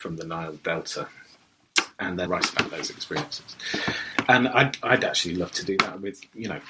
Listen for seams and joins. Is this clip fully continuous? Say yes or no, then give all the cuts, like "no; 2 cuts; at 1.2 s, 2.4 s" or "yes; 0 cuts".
no; 1 cut; at 2.3 s